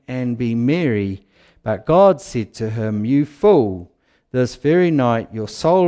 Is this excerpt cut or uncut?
uncut